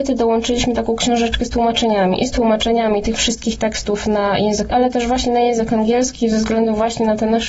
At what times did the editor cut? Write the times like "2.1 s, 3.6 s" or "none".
4.7 s

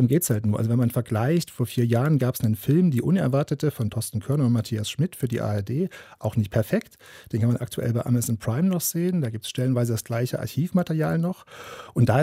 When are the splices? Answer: none

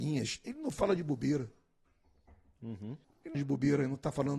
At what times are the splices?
3.0 s, 3.3 s

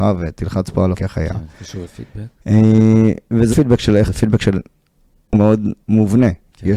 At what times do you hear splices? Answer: 0.9 s, 1.8 s, 3.5 s, 4.1 s, 5.3 s

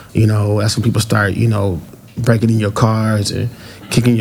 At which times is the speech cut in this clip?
none

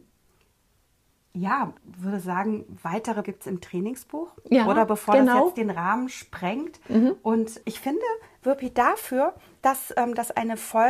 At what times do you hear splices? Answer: 1.8 s, 3.2 s, 7.6 s

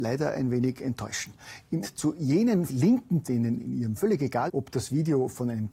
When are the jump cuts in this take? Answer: 1.8 s, 2.7 s, 3.2 s, 4.0 s, 4.5 s

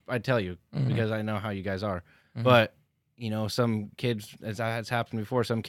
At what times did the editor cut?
none

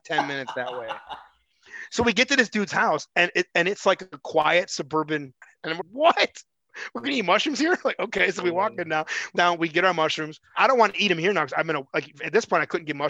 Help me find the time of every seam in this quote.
5.8 s, 9.3 s, 10.5 s

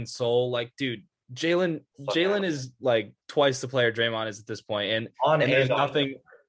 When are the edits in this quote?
1.9 s

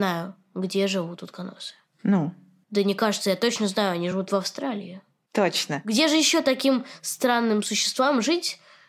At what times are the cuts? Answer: none

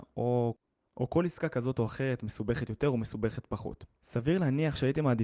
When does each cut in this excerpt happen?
none

